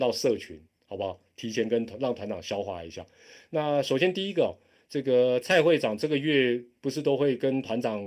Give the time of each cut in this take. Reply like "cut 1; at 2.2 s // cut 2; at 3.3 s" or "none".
none